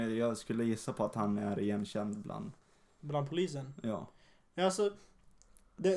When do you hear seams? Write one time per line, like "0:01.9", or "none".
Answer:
none